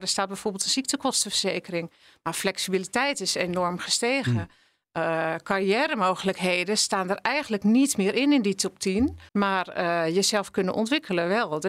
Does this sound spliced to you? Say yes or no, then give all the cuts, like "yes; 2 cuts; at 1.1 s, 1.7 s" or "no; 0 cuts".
yes; 1 cut; at 9.3 s